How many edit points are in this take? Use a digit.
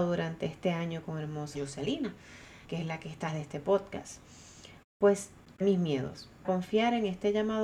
5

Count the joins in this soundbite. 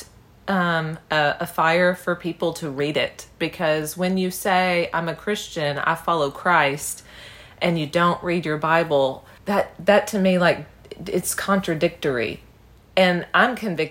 1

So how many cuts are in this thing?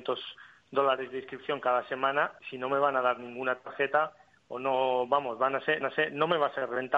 2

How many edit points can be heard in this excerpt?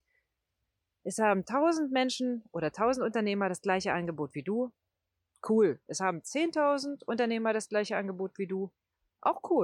0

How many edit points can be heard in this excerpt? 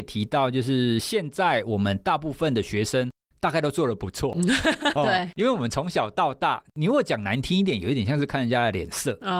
1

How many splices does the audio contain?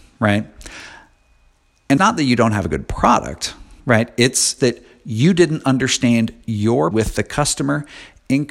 4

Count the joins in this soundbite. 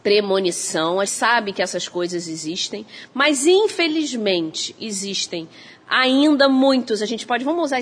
1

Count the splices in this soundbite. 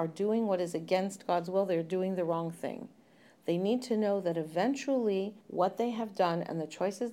1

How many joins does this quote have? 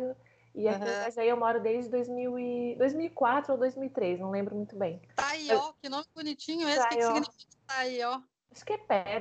1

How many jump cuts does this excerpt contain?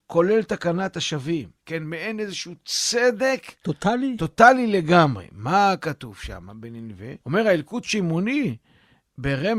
2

